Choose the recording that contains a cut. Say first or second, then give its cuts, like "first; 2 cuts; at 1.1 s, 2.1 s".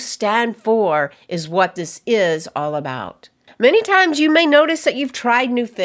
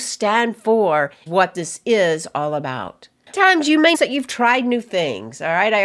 second; 3 cuts; at 1.3 s, 3.3 s, 3.9 s